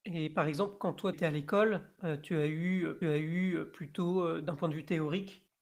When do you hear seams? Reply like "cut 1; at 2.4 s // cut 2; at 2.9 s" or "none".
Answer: cut 1; at 1.1 s // cut 2; at 3.0 s